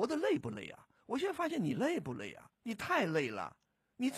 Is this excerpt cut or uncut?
cut